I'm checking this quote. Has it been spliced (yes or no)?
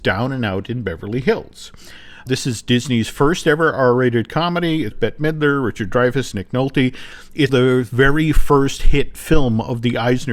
yes